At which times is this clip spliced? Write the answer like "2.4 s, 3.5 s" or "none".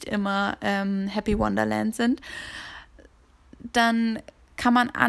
none